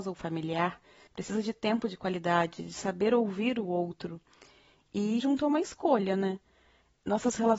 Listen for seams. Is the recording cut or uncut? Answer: cut